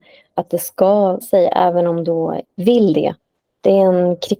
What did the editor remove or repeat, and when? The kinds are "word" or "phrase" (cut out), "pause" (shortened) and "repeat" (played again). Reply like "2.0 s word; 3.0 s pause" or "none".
1.2 s word; 2.4 s word